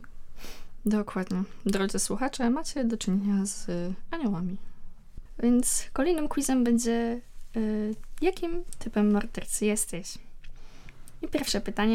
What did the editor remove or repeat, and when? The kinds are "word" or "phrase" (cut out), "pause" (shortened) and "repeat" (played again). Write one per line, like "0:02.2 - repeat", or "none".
none